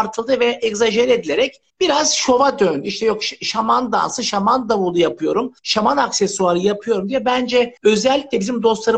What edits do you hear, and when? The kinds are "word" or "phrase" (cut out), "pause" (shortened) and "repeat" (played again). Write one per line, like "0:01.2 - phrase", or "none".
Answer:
0:01.7 - pause
0:05.6 - pause
0:07.8 - pause